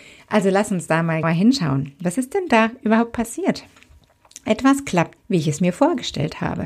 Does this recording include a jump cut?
yes; 2 cuts; at 1.2 s, 5.2 s

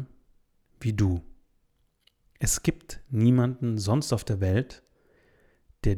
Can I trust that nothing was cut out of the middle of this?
yes; 0 cuts

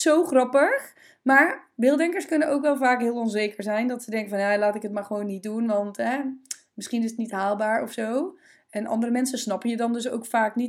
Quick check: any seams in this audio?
no; 0 cuts

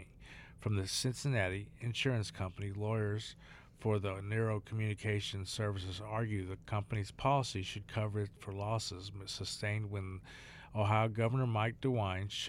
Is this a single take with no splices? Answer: yes; 0 cuts

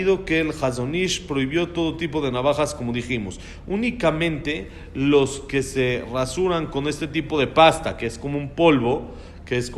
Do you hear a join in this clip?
no; 0 cuts

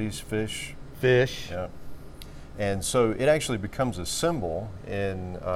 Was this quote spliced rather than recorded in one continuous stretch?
no; 0 cuts

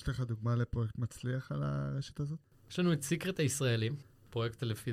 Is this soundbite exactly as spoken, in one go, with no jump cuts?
yes; 0 cuts

